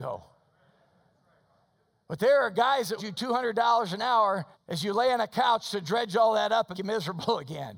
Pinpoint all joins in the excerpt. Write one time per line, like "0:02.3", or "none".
0:03.0
0:04.5
0:06.7